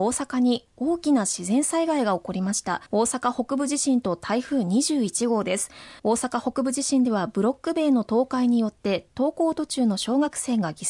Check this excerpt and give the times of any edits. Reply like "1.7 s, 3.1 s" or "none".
2.9 s, 6.0 s